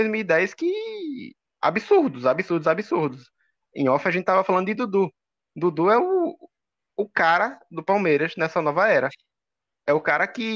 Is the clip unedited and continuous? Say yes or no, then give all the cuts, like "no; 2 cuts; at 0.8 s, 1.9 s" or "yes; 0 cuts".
yes; 0 cuts